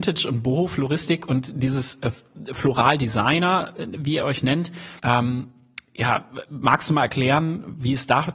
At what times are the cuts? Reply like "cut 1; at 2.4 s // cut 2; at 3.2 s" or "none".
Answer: cut 1; at 5.0 s